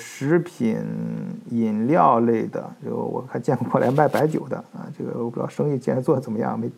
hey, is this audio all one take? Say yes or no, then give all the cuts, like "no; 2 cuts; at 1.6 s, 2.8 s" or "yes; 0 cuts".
yes; 0 cuts